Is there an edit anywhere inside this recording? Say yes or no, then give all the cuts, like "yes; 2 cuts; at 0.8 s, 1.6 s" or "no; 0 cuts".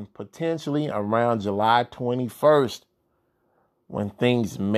no; 0 cuts